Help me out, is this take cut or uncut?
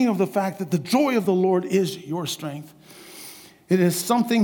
uncut